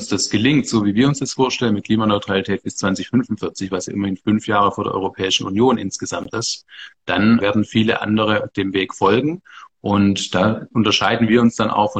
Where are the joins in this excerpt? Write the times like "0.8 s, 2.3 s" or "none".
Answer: 7.4 s